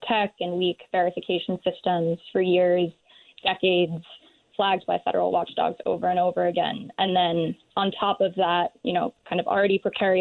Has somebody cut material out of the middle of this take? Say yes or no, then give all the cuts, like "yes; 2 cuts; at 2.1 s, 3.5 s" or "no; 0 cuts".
no; 0 cuts